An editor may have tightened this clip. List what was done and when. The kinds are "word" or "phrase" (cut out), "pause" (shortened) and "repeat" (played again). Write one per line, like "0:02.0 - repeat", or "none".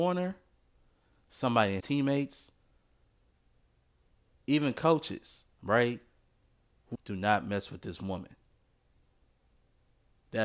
0:01.8 - phrase
0:05.5 - pause
0:06.9 - phrase